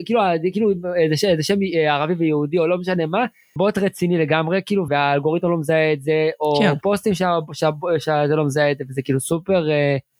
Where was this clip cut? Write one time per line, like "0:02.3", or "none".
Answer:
0:03.6
0:04.9